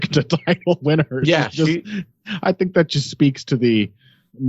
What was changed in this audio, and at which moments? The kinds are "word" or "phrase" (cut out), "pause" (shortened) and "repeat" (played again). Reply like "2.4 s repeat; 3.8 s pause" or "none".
none